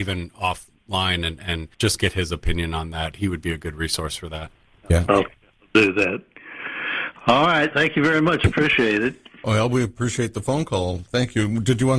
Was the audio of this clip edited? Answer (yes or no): yes